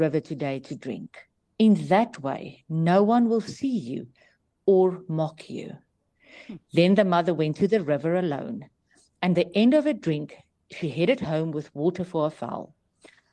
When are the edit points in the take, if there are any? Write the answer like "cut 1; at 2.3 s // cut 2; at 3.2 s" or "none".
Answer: cut 1; at 1.4 s // cut 2; at 9.4 s